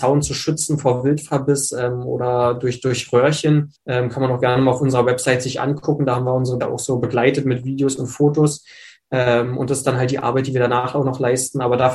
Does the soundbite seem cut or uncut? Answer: cut